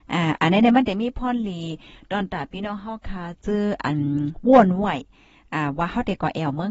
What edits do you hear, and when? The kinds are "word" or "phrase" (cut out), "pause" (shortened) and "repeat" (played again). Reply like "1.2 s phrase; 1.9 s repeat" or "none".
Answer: none

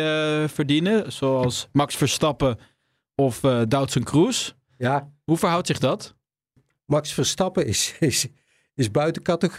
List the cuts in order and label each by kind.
none

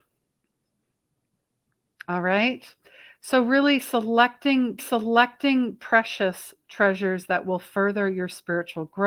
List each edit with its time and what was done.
4.8 s repeat

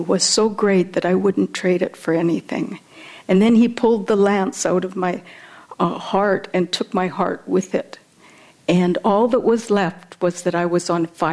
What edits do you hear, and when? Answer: none

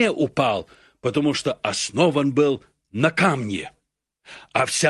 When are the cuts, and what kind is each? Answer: none

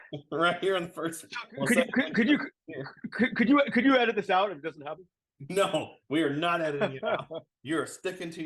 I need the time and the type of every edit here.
none

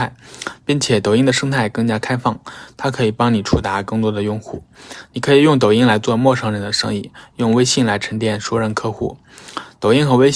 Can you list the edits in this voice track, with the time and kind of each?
none

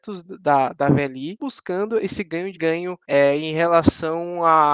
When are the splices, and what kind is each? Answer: 1.4 s phrase; 2.5 s phrase; 3.0 s pause

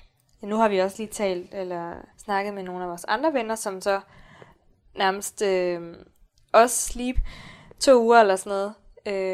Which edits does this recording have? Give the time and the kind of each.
2.1 s pause; 7.2 s word

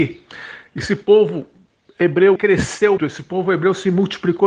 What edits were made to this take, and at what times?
2.4 s word; 3.0 s word

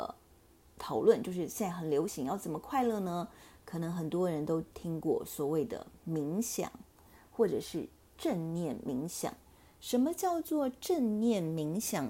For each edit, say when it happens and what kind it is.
none

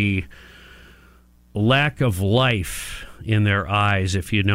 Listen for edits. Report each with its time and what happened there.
none

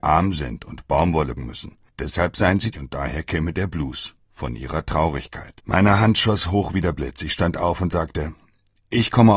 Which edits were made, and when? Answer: 1.4 s word; 1.9 s pause; 2.7 s word; 4.2 s pause; 5.6 s pause

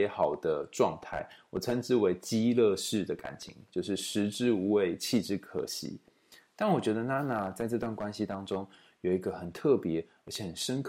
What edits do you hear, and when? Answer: none

